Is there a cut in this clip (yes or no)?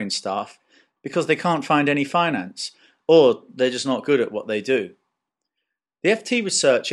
no